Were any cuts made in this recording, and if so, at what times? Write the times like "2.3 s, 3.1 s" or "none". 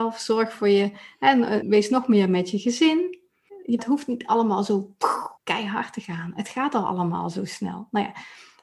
1.6 s, 3.8 s, 5.4 s